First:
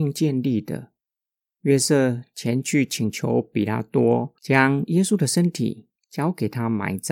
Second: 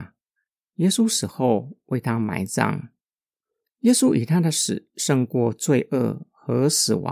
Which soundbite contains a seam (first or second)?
first